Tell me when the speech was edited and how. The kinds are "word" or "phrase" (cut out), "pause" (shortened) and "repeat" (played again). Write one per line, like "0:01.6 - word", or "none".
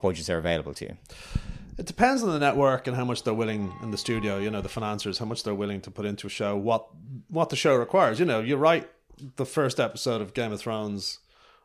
none